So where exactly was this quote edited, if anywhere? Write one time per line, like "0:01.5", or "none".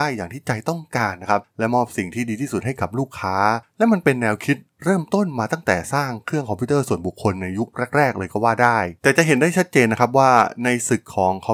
0:09.0